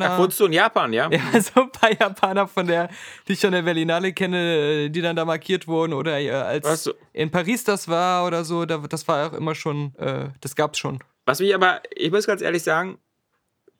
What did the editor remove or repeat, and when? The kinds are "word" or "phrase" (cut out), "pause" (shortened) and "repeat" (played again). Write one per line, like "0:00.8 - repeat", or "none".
none